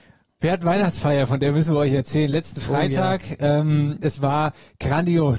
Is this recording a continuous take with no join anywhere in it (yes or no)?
yes